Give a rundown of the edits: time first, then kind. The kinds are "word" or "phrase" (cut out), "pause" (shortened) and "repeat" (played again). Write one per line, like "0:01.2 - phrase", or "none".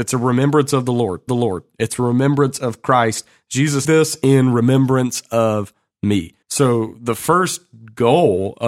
0:01.3 - repeat
0:03.8 - phrase
0:06.4 - pause